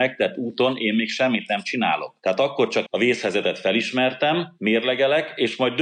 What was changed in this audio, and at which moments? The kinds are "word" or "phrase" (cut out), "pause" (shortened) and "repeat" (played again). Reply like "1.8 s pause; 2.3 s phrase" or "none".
2.9 s word